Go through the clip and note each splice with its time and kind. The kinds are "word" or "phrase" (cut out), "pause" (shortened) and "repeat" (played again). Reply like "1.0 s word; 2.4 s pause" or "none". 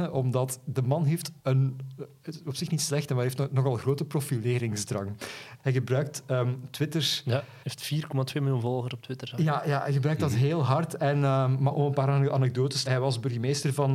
1.4 s pause; 7.6 s pause; 11.7 s word; 12.9 s word